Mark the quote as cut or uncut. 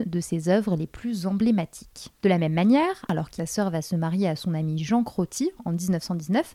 cut